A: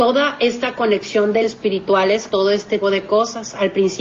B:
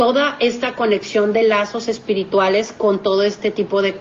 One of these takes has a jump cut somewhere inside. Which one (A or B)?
A